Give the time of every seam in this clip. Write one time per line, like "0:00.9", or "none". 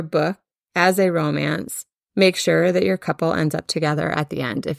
none